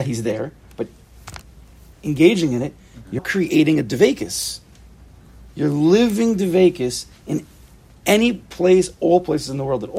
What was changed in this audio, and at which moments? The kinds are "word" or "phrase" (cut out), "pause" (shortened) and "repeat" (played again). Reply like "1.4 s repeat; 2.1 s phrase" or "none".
3.2 s word